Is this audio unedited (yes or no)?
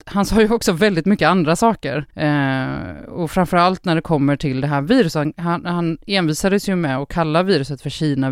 no